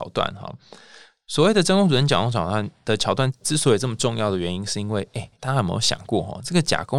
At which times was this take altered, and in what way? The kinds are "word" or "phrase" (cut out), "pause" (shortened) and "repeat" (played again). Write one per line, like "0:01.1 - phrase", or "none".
0:05.3 - pause